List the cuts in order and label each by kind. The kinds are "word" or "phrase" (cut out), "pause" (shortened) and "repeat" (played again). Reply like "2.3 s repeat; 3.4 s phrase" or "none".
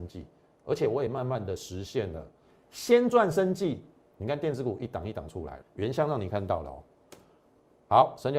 5.6 s word